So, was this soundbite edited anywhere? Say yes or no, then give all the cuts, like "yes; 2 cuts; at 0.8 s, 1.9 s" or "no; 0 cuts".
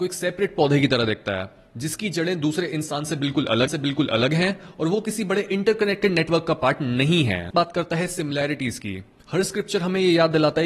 yes; 2 cuts; at 3.7 s, 7.5 s